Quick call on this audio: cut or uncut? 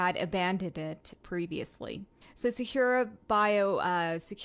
cut